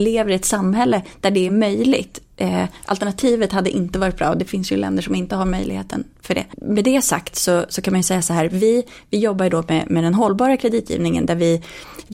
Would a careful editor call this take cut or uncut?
uncut